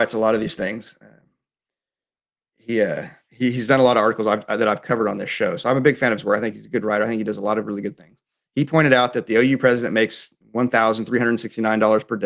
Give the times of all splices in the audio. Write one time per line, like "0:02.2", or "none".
none